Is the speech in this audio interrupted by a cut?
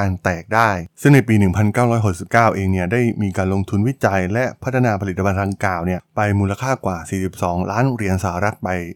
yes; 1 cut; at 0.9 s

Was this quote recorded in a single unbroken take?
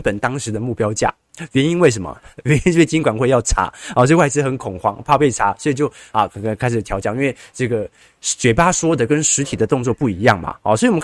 yes; 0 cuts

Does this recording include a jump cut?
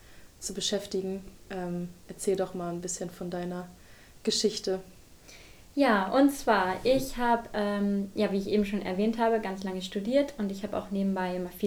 no; 0 cuts

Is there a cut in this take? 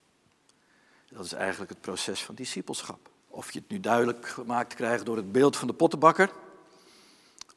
yes; 1 cut; at 3.2 s

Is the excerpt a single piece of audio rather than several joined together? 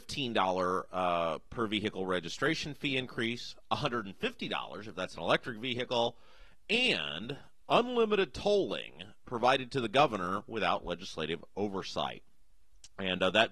yes; 0 cuts

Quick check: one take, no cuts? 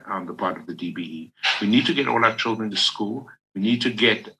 no; 1 cut; at 2.7 s

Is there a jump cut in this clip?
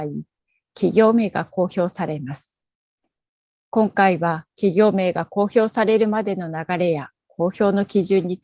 no; 0 cuts

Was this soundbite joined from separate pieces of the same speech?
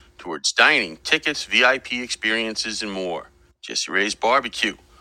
yes; 1 cut; at 3.5 s

